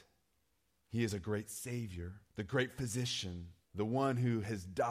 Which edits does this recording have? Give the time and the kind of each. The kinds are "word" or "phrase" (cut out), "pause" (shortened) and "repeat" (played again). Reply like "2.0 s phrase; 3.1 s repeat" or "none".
2.2 s pause; 3.6 s pause